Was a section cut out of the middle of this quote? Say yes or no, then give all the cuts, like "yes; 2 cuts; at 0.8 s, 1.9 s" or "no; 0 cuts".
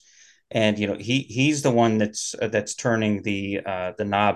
no; 0 cuts